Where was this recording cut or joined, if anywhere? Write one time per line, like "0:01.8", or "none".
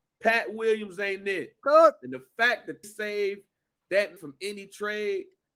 0:02.8
0:04.2